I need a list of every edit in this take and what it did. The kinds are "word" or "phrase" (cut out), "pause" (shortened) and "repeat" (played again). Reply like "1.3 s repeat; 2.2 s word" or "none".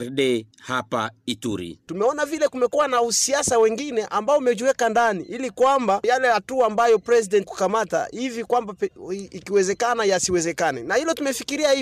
7.4 s word